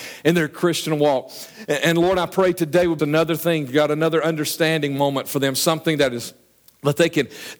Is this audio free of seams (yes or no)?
no